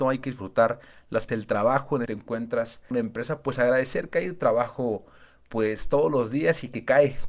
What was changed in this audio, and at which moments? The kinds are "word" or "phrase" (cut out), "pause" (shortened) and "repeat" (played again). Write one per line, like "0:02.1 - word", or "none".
0:01.3 - word
0:02.1 - phrase
0:02.9 - phrase